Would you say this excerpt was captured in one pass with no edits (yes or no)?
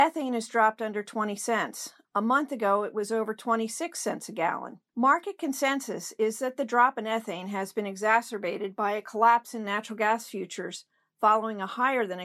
no